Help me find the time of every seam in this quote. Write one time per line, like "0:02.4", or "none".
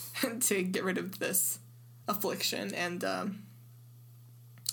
none